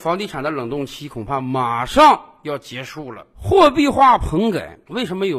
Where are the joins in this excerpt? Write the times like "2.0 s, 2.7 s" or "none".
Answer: 3.3 s